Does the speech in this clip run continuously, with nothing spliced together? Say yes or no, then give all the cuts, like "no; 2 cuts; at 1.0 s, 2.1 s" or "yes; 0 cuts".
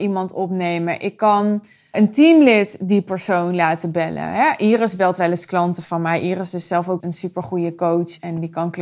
no; 2 cuts; at 1.9 s, 7.0 s